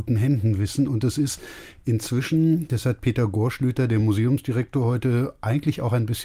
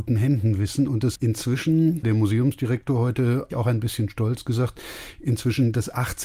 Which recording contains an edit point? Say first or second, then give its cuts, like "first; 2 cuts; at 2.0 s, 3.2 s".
second; 3 cuts; at 1.1 s, 2.0 s, 3.5 s